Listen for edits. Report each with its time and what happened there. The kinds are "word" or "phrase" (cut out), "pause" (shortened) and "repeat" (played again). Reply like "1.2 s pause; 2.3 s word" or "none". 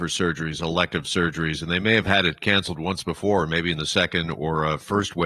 none